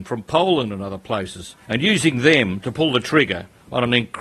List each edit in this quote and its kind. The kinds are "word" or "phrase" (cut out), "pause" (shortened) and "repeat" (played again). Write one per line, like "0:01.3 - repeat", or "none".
0:01.6 - pause